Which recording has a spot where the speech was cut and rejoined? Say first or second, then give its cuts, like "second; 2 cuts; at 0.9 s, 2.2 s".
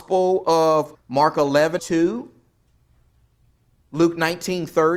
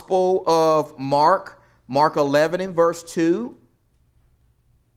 first; 2 cuts; at 0.9 s, 1.8 s